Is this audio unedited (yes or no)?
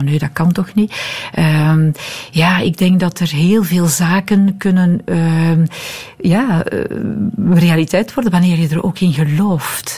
yes